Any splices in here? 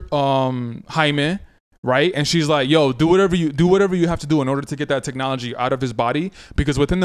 no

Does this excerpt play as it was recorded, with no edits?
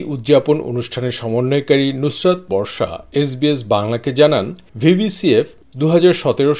no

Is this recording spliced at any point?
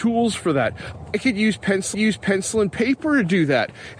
yes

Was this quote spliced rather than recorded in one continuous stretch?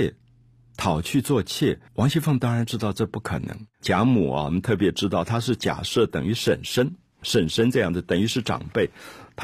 yes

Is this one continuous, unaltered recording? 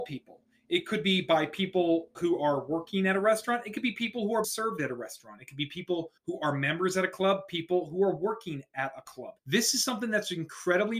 no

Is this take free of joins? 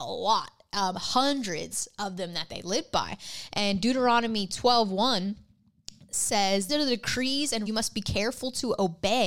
no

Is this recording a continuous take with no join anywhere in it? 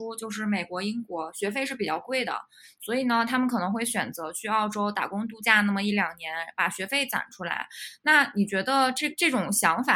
yes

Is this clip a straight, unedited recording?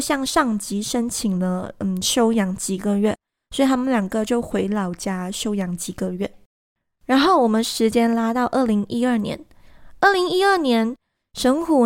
yes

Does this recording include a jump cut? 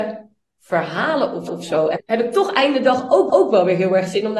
yes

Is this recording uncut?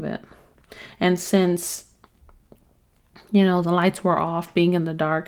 yes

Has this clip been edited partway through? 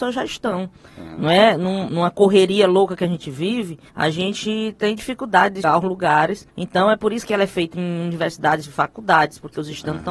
yes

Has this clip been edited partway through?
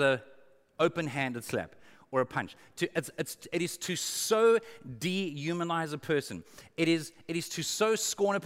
no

